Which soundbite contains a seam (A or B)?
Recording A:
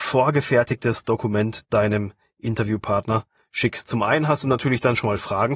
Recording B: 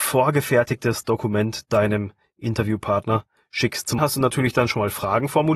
B